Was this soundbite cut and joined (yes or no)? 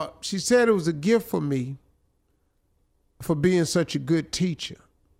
no